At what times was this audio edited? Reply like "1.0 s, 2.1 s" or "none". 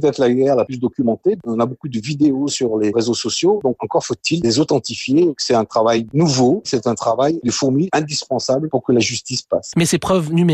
none